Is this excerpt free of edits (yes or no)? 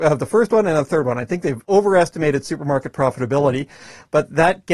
no